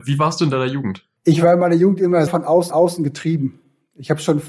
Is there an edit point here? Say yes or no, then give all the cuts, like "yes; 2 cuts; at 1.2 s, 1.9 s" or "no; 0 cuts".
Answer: yes; 3 cuts; at 1.2 s, 2.3 s, 2.7 s